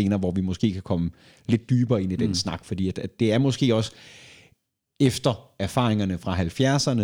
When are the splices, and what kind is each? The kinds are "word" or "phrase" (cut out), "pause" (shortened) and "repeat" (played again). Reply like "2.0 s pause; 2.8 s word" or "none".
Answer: 3.2 s word